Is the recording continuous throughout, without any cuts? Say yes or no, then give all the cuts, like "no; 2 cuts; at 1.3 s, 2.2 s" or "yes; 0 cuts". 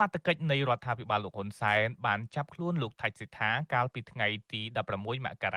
yes; 0 cuts